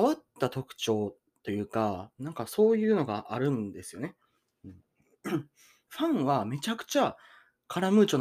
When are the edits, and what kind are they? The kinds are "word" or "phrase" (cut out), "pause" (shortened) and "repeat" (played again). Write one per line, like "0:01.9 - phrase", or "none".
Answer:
0:05.9 - word